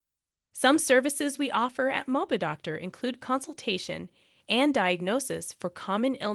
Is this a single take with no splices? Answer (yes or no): yes